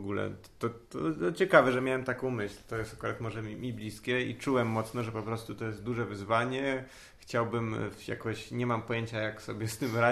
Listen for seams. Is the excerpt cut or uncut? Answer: uncut